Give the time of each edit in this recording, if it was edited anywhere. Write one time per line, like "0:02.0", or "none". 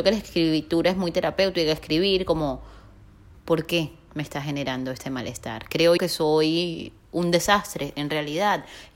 0:06.0